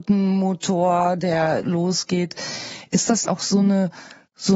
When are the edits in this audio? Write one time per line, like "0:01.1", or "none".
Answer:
0:01.6
0:03.3